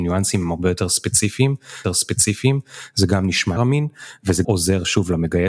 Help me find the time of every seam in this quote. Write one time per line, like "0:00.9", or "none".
0:01.8
0:03.6
0:04.4